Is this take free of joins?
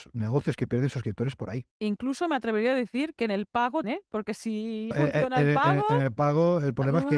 no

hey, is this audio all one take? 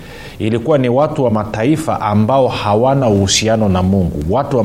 yes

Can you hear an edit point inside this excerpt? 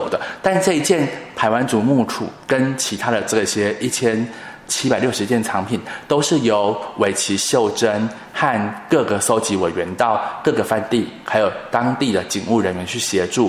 yes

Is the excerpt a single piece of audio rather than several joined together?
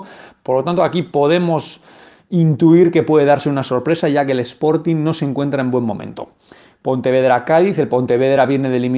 yes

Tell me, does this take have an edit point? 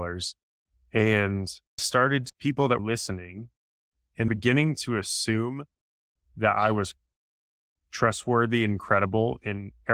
yes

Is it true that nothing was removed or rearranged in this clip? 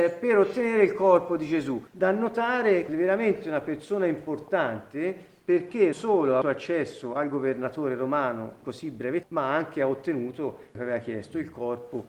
no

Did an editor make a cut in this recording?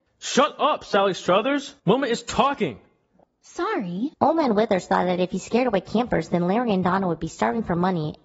yes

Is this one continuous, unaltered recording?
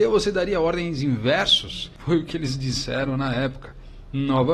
yes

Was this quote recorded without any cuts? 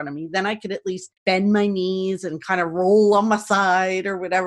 no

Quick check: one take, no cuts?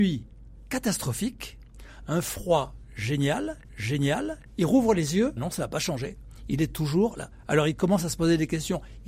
no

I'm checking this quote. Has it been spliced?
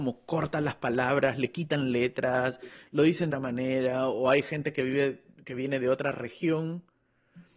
yes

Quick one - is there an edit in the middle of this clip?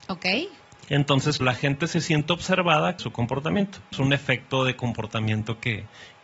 yes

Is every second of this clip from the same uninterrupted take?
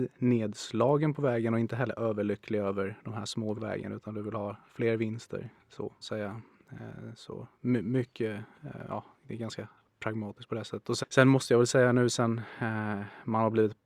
no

